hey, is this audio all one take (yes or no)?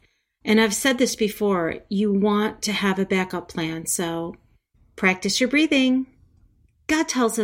yes